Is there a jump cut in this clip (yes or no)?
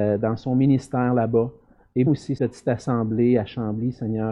yes